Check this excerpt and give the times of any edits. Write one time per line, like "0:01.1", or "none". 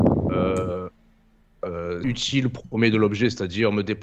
0:02.0